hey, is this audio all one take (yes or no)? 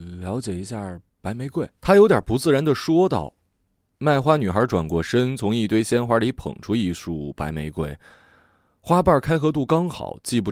no